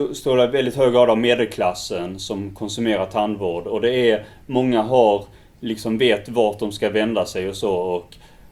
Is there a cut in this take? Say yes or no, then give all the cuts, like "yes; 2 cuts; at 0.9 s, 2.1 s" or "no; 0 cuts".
no; 0 cuts